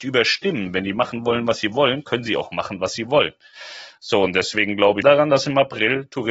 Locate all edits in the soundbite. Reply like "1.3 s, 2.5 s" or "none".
5.0 s